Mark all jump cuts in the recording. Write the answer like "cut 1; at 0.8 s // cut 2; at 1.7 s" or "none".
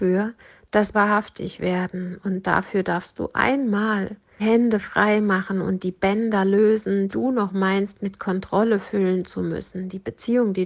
cut 1; at 0.9 s // cut 2; at 4.4 s // cut 3; at 7.1 s